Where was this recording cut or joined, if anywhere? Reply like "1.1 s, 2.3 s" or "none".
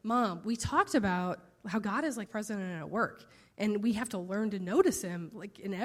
2.3 s